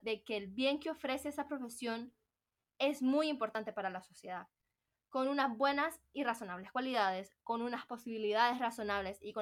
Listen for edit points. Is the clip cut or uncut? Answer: uncut